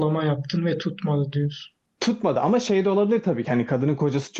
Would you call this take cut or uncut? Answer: uncut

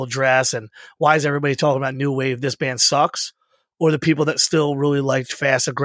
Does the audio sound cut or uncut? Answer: uncut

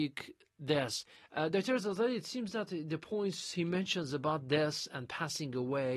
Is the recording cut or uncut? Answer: uncut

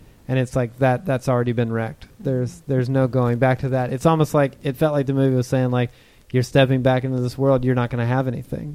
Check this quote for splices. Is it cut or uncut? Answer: uncut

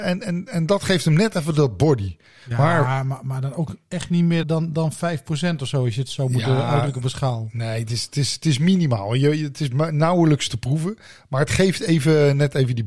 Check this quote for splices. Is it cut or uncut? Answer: cut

